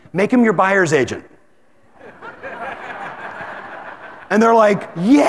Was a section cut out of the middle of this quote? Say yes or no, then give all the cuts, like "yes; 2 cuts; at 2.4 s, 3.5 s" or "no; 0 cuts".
no; 0 cuts